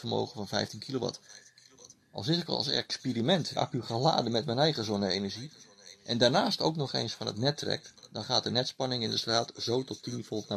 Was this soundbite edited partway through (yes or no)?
yes